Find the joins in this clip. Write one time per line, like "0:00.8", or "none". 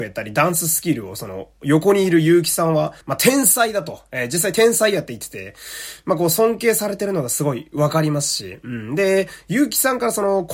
0:03.0